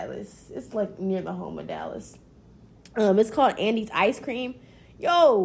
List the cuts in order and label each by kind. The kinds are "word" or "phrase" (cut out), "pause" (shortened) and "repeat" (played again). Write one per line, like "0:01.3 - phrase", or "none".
none

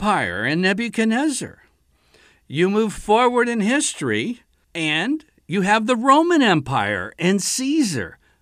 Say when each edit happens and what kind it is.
none

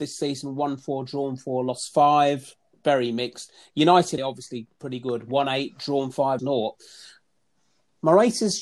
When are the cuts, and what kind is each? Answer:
0:04.2 - word
0:04.7 - pause
0:06.4 - word

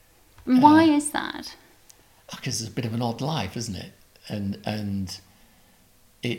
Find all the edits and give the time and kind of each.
none

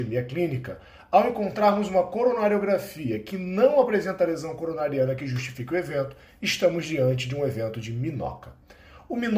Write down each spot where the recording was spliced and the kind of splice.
none

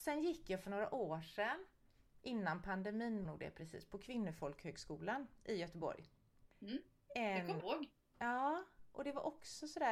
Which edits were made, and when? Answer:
0:03.2 - word
0:06.5 - pause
0:07.6 - word

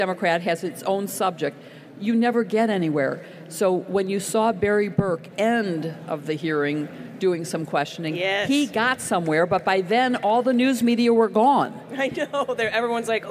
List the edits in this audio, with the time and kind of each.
0:05.3 - phrase

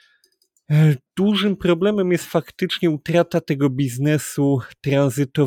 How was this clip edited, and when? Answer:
0:01.1 - pause

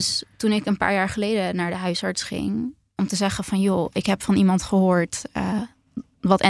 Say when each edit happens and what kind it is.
none

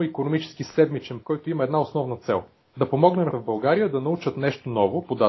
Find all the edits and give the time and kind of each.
0:01.2 - word
0:02.7 - pause
0:03.3 - word

